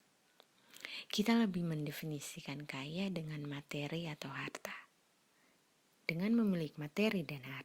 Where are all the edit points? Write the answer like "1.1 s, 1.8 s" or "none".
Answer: 6.7 s